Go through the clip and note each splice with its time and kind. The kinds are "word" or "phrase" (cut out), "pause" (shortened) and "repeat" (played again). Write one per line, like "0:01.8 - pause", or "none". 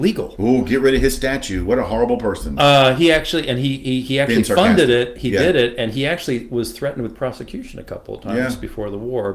none